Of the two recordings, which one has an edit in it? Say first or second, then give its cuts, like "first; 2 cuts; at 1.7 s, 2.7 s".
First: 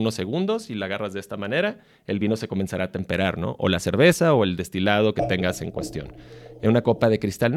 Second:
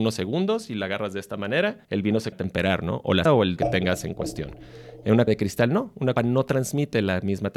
second; 6 cuts; at 1.8 s, 2.3 s, 3.3 s, 3.6 s, 5.3 s, 6.2 s